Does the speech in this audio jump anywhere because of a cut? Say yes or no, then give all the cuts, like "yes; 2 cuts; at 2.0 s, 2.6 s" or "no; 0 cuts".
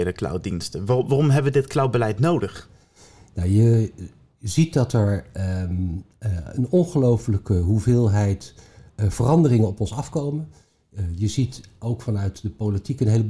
no; 0 cuts